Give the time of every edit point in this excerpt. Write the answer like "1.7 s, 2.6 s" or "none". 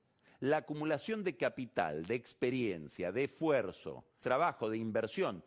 4.2 s